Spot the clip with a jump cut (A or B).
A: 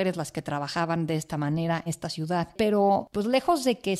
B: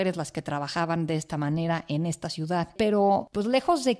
A